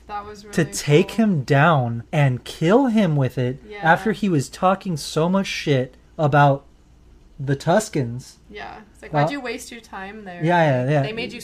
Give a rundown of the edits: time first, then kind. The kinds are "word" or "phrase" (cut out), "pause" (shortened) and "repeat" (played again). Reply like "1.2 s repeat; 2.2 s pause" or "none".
2.1 s pause; 6.1 s pause